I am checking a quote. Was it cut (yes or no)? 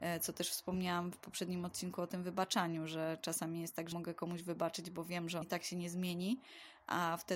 yes